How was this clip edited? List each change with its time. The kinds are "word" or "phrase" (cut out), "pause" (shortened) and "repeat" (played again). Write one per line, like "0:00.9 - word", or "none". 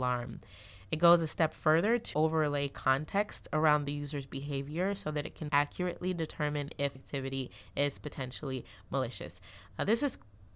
0:02.1 - word
0:05.5 - word
0:07.0 - word